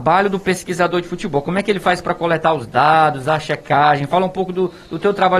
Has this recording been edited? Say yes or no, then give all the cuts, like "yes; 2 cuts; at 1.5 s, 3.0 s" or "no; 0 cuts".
no; 0 cuts